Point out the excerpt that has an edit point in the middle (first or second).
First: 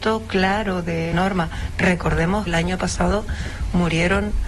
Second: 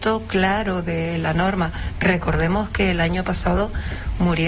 first